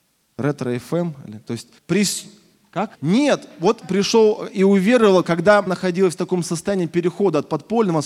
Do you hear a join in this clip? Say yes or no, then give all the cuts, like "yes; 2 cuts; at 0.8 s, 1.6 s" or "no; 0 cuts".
yes; 5 cuts; at 1.4 s, 1.8 s, 2.9 s, 3.8 s, 5.7 s